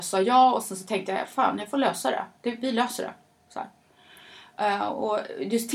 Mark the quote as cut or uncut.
uncut